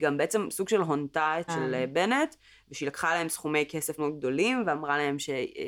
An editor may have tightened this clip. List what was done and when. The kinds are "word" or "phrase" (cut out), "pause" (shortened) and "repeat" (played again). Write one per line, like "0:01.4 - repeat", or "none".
0:01.5 - word
0:04.0 - word